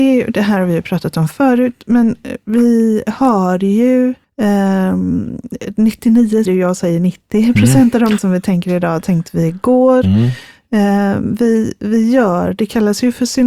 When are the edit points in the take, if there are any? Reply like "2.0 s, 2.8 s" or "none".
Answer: 4.2 s, 6.5 s, 8.2 s